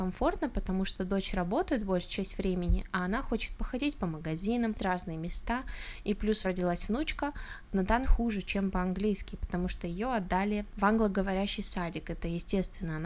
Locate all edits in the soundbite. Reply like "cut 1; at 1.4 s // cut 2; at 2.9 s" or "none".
cut 1; at 4.7 s // cut 2; at 6.4 s // cut 3; at 7.6 s // cut 4; at 8.0 s